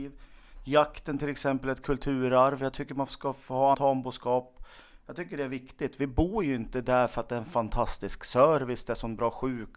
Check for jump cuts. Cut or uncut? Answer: cut